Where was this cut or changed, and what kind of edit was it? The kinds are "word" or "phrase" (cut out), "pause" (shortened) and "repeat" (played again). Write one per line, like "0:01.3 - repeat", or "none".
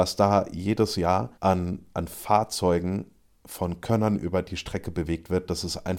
0:01.3 - pause